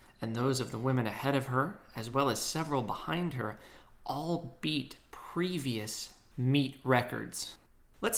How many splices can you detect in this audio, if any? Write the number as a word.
zero